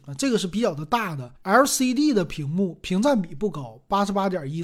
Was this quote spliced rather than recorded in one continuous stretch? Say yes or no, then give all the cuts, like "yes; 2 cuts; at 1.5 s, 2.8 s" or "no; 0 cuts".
yes; 1 cut; at 1.4 s